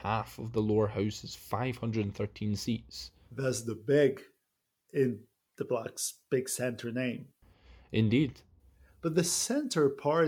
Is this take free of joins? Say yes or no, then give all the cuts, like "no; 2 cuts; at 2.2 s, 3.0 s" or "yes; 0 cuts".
yes; 0 cuts